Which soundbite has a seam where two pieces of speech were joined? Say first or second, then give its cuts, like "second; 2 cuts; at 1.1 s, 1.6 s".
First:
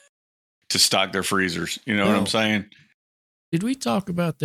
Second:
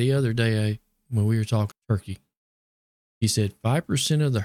second; 1 cut; at 1.7 s